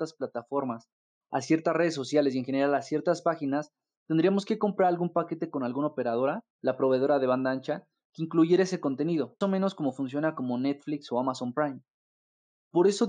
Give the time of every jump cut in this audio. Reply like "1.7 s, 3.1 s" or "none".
6.5 s, 9.4 s